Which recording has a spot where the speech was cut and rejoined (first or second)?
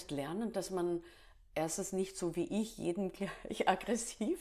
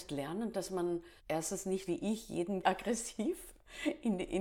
second